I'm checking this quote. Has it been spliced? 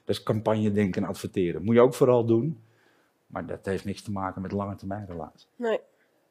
no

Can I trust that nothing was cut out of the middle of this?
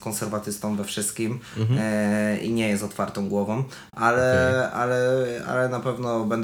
yes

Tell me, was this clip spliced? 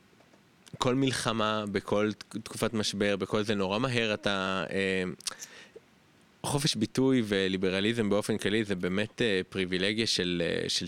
no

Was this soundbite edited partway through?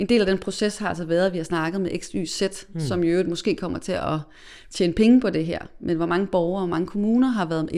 no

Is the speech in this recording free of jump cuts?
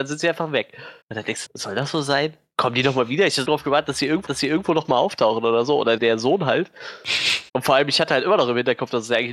no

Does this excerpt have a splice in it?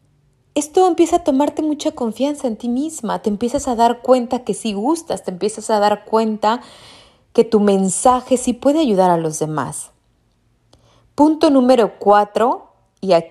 no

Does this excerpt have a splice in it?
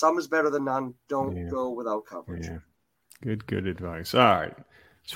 no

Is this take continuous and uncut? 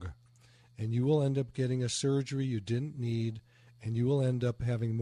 yes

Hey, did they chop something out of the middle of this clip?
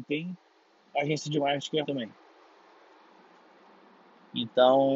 yes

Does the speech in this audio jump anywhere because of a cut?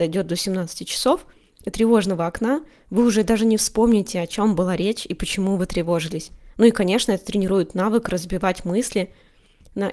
no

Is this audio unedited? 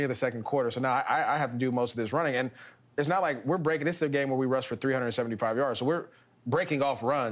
yes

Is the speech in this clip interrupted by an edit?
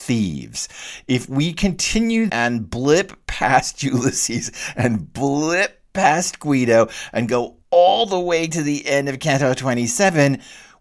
yes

